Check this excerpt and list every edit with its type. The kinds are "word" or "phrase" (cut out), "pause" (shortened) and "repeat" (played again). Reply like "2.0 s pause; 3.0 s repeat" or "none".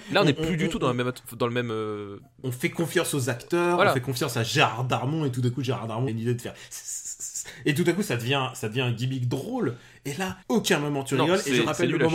6.1 s word; 10.4 s pause